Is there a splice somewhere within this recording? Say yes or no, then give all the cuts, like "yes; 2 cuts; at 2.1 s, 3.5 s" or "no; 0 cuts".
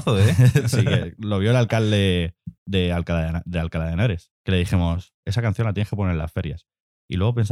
yes; 2 cuts; at 2.6 s, 4.4 s